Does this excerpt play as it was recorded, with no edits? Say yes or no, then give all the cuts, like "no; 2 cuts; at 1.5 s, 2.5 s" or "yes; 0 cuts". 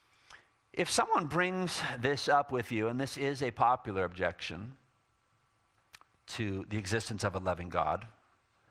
yes; 0 cuts